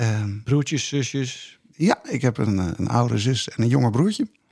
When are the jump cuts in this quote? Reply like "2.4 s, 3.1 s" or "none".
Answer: none